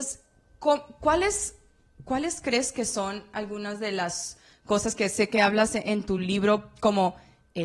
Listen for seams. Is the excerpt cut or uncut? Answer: uncut